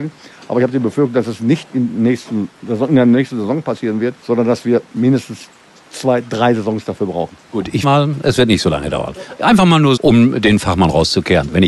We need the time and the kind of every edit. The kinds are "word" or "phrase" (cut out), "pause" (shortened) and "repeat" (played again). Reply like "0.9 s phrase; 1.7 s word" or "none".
4.2 s pause; 5.8 s pause; 7.4 s pause; 7.8 s word; 10.0 s word